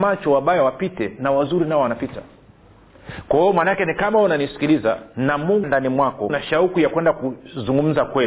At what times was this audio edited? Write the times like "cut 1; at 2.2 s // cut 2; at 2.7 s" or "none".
cut 1; at 5.6 s // cut 2; at 6.3 s